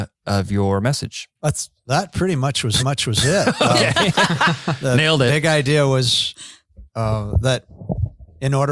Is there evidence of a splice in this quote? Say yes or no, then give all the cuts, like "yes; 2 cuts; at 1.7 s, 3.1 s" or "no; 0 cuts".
yes; 3 cuts; at 1.4 s, 2.8 s, 6.9 s